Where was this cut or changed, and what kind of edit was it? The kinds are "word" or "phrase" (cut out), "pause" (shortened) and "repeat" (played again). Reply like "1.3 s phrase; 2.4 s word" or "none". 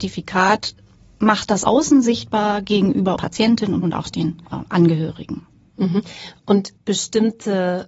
1.6 s phrase; 3.2 s word; 3.8 s word; 4.5 s pause; 6.8 s phrase

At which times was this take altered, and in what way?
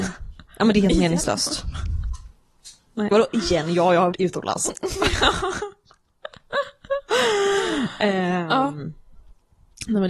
3.1 s word; 4.1 s word

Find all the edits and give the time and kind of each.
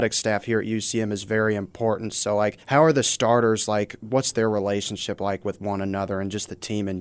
2.6 s pause

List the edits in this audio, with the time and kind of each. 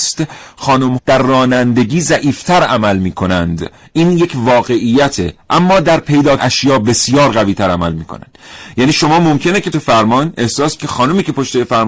1.0 s word; 6.4 s word; 9.7 s word; 10.8 s word

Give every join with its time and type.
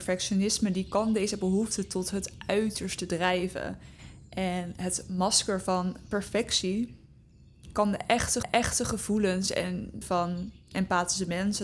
8.4 s repeat; 10.0 s word

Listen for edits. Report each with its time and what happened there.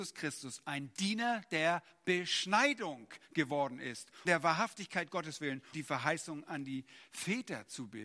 4.2 s word; 5.7 s word

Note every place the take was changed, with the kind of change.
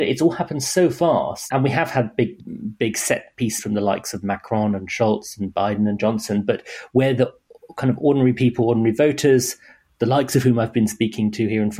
3.6 s word

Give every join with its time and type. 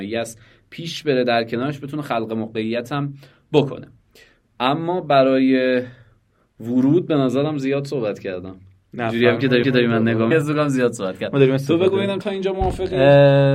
9.6 s repeat; 10.3 s word; 12.2 s word

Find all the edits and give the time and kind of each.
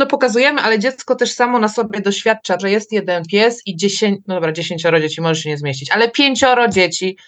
2.6 s word

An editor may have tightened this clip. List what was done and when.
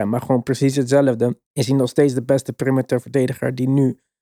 1.5 s pause

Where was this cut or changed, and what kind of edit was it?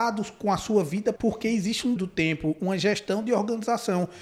1.2 s word; 2.0 s word

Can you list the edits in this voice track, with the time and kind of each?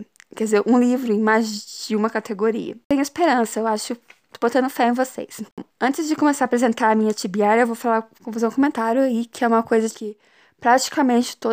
5.7 s pause; 8.1 s pause; 9.9 s word

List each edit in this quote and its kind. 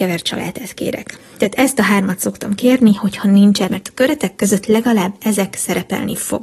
3.7 s word

